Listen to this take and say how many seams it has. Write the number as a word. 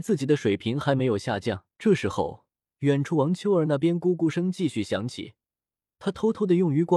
one